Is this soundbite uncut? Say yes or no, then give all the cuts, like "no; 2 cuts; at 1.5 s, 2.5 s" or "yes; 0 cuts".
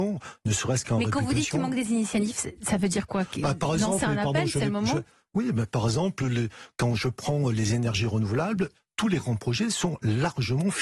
yes; 0 cuts